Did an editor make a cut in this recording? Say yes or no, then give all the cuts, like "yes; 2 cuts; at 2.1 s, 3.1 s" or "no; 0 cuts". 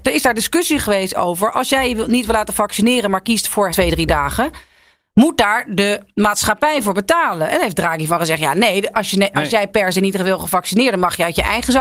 yes; 1 cut; at 3.7 s